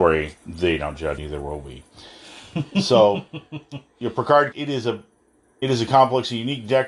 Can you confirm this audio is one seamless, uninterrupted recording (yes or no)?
no